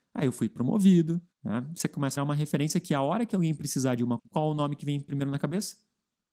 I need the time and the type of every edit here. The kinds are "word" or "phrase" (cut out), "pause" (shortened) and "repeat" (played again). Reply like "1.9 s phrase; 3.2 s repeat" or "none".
1.3 s pause; 2.2 s word; 4.2 s phrase